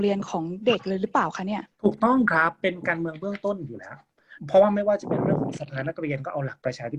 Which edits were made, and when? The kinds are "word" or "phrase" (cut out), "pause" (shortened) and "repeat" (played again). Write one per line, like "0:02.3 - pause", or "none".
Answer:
0:01.7 - pause
0:04.4 - pause